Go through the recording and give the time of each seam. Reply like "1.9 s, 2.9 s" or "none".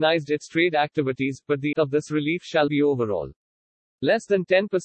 1.7 s, 2.7 s